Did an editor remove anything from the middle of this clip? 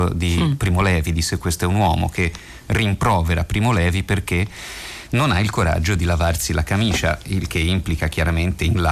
no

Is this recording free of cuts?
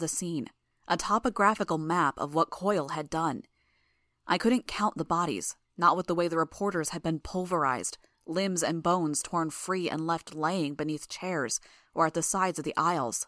yes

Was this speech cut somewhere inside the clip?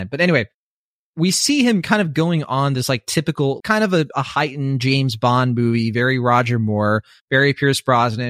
yes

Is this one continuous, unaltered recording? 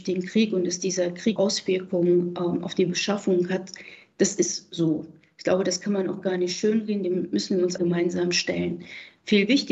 no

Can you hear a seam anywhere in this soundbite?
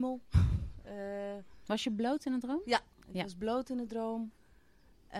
no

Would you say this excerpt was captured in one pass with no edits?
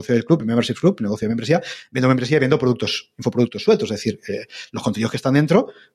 yes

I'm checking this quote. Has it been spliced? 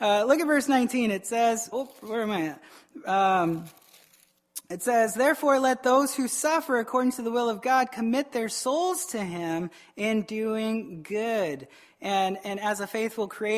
yes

